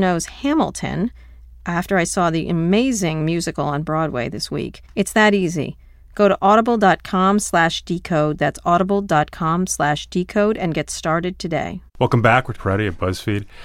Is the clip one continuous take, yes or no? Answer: no